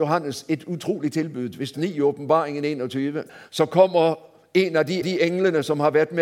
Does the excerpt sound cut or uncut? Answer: cut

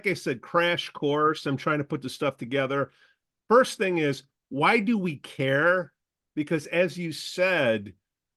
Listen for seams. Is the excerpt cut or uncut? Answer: uncut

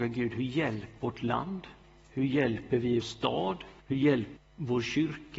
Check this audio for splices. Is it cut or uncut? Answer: cut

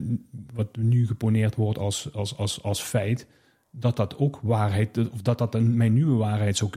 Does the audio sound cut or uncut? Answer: uncut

